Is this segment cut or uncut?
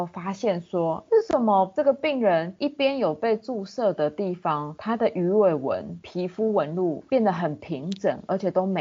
cut